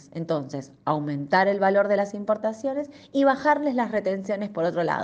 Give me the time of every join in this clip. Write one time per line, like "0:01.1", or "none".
none